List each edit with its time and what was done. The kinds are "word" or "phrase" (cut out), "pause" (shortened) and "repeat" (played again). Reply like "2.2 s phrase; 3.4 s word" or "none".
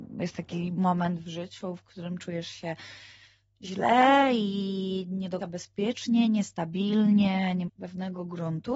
5.4 s word; 7.7 s word